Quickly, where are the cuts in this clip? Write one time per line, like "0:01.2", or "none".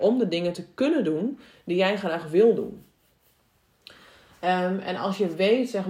none